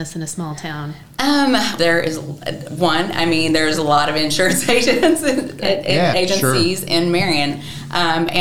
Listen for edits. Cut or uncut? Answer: cut